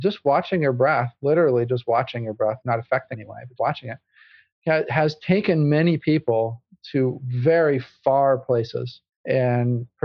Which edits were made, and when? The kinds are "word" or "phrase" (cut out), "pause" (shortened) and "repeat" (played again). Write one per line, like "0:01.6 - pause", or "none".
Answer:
0:02.6 - word
0:03.1 - phrase
0:03.6 - word
0:09.1 - pause